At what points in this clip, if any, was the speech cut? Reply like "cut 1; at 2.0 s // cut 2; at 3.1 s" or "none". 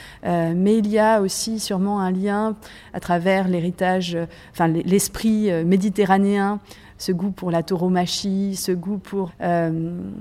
cut 1; at 9.3 s